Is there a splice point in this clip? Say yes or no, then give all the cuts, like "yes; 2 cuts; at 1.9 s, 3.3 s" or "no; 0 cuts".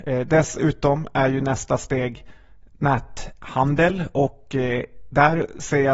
no; 0 cuts